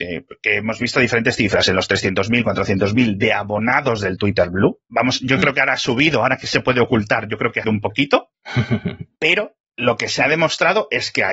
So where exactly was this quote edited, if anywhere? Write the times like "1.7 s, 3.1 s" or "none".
7.6 s, 9.6 s